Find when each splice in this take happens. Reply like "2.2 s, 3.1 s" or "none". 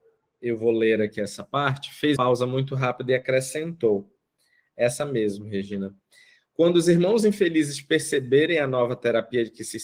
2.2 s